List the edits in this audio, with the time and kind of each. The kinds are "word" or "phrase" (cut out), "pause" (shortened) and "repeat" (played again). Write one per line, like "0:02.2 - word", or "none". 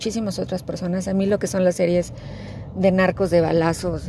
none